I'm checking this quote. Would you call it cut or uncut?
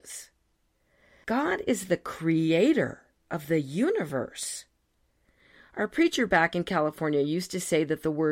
uncut